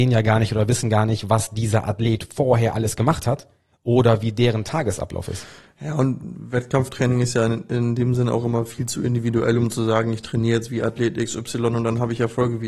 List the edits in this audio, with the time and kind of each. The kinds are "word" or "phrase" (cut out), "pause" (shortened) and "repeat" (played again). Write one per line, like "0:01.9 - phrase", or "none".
none